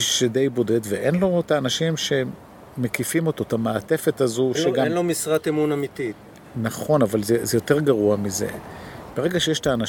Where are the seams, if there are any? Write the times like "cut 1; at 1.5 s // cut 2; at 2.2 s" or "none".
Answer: cut 1; at 4.6 s